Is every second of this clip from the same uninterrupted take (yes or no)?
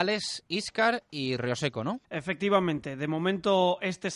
no